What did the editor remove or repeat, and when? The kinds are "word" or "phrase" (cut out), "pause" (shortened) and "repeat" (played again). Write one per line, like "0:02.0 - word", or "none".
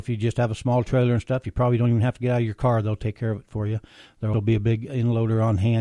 0:04.3 - word